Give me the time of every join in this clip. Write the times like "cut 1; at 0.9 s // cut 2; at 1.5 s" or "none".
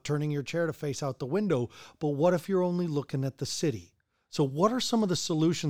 none